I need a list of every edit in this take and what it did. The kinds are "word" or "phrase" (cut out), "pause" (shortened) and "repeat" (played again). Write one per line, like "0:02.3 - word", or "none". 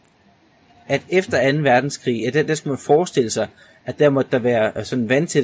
none